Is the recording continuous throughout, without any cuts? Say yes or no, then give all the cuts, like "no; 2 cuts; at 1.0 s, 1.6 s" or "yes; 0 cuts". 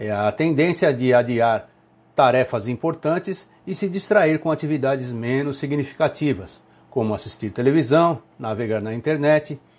yes; 0 cuts